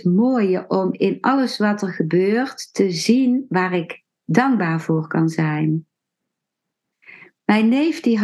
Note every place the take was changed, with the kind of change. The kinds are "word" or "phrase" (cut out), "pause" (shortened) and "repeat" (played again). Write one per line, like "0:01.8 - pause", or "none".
none

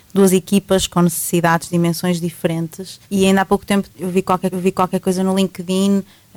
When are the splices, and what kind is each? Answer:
0:01.7 - word
0:03.0 - pause
0:03.9 - pause
0:04.5 - repeat

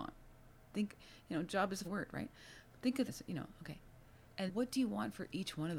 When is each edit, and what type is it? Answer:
0:01.8 - word
0:03.1 - word
0:04.5 - word

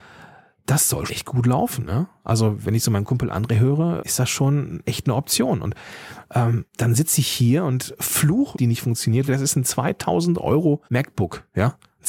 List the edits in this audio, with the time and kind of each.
0:01.1 - word
0:04.0 - word
0:06.7 - pause
0:08.5 - phrase
0:09.3 - phrase
0:10.8 - pause

